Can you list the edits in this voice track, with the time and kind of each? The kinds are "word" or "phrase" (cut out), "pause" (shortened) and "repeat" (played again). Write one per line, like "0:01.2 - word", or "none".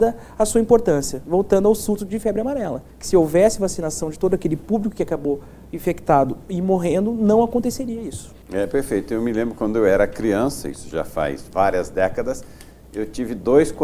0:02.9 - pause
0:08.4 - pause

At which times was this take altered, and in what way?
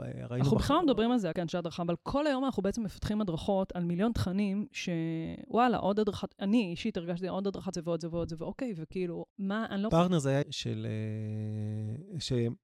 0:01.3 - word
0:07.7 - phrase
0:09.3 - pause
0:09.9 - phrase
0:10.4 - word

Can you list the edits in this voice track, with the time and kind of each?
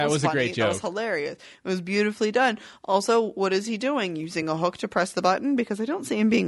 none

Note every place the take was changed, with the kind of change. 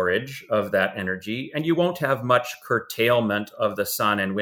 none

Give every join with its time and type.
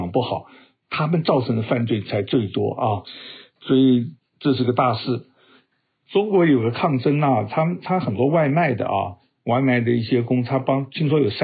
none

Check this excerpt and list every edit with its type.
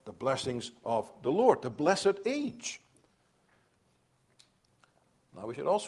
none

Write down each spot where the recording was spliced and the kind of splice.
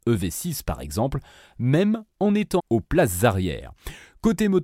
0:02.6 - word

